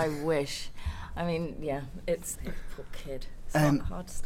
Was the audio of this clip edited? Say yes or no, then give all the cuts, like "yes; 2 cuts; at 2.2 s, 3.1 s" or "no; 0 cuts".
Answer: yes; 1 cut; at 2.3 s